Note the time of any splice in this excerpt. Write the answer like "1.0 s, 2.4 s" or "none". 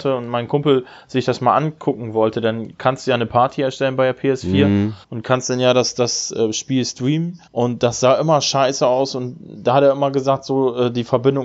5.0 s, 7.5 s